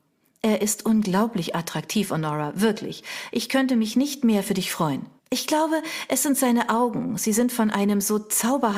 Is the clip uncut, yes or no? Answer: no